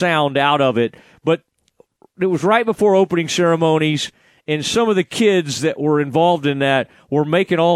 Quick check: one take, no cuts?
yes; 0 cuts

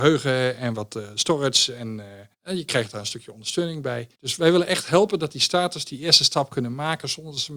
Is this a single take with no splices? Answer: no; 2 cuts; at 2.3 s, 4.1 s

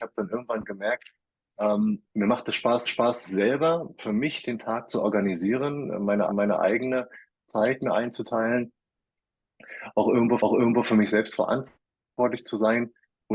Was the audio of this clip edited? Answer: yes; 4 cuts; at 2.1 s, 2.9 s, 6.3 s, 10.4 s

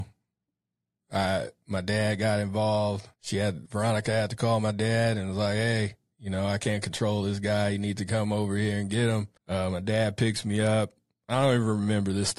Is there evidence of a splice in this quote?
yes; 3 cuts; at 3.1 s, 3.7 s, 9.4 s

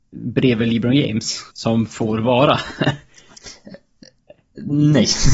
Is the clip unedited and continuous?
no; 1 cut; at 1.5 s

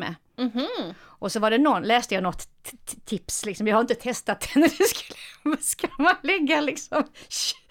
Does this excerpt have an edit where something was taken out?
no; 0 cuts

